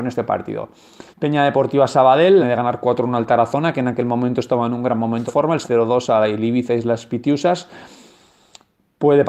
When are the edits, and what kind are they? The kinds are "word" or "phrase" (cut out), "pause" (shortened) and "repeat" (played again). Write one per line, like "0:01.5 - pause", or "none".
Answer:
0:01.1 - pause
0:02.4 - phrase
0:05.3 - word
0:05.6 - word